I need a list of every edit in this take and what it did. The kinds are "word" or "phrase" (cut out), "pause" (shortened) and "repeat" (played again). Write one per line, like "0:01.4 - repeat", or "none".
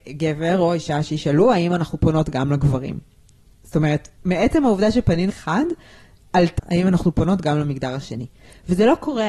0:04.1 - pause
0:05.3 - word
0:06.6 - word